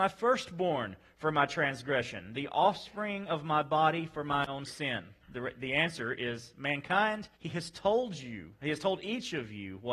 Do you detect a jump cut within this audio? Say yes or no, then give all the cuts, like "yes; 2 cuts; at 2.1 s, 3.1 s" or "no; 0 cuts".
yes; 2 cuts; at 5.2 s, 7.3 s